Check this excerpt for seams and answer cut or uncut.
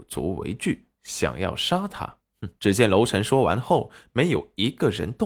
cut